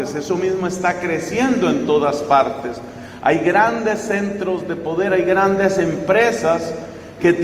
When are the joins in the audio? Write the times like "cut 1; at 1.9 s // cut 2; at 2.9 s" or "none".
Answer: none